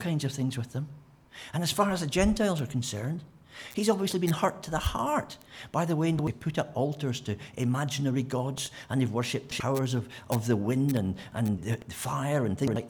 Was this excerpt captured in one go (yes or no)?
no